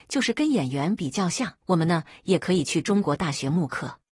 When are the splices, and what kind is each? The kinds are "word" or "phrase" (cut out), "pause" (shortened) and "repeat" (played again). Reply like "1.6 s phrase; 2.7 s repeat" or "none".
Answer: 1.6 s pause